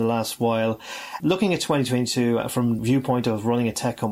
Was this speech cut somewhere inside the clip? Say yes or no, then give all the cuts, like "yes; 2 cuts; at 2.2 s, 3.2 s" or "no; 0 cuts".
yes; 2 cuts; at 1.2 s, 2.8 s